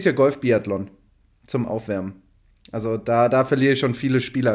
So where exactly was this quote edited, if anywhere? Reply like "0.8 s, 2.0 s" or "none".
none